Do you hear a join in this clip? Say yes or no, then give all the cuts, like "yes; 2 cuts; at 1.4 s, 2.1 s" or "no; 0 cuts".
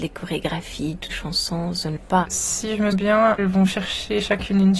yes; 4 cuts; at 1.1 s, 2.0 s, 2.9 s, 3.4 s